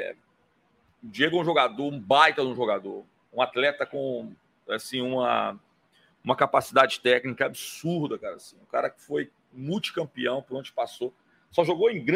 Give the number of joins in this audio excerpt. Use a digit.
0